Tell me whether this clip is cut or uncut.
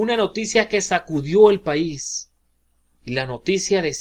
uncut